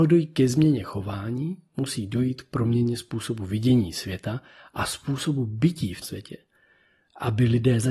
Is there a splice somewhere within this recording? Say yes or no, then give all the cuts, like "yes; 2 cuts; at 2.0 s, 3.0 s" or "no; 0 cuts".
yes; 1 cut; at 6.0 s